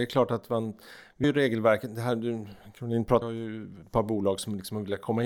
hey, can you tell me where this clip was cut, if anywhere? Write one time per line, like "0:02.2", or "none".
0:01.2
0:03.2